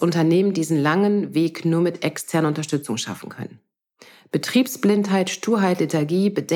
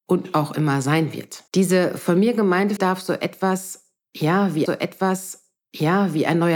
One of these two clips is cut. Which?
second; 3 cuts; at 1.5 s, 2.8 s, 4.7 s

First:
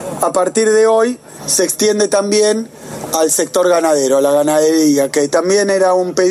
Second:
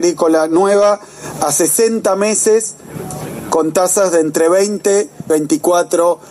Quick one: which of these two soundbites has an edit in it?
second; 1 cut; at 5.3 s

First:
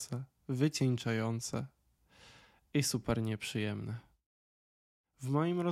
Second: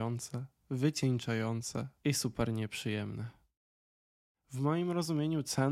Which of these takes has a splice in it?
second; 1 cut; at 2.0 s

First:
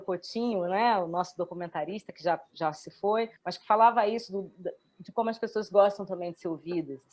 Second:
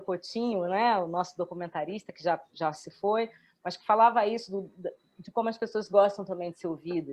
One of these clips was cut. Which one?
first; 1 cut; at 3.4 s

